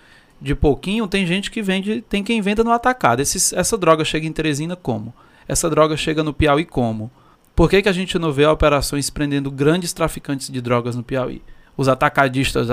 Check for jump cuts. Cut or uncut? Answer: cut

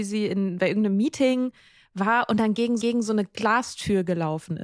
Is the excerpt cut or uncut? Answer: cut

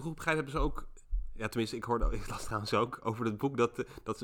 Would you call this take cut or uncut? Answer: uncut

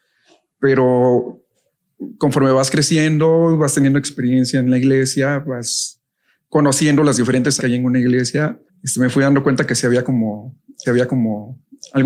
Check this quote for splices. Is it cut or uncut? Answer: cut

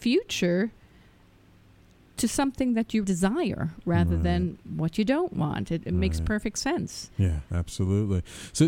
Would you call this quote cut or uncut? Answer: cut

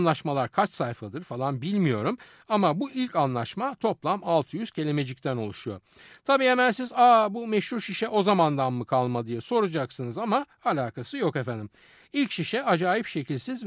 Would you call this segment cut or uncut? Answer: uncut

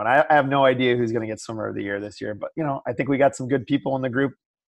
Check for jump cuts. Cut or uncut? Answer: uncut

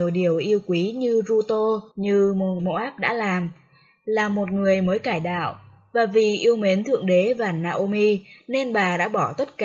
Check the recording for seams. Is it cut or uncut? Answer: cut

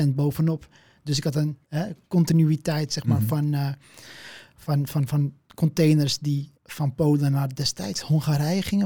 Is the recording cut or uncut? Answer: cut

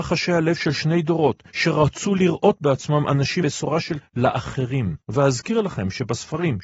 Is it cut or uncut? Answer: cut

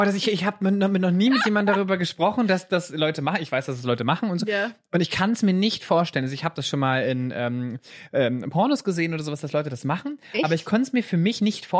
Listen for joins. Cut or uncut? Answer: uncut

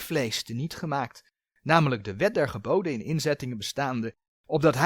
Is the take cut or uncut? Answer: uncut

